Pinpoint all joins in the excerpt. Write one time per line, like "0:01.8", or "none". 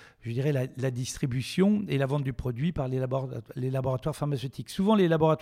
none